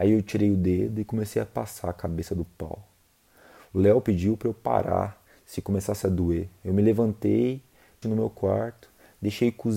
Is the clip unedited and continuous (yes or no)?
no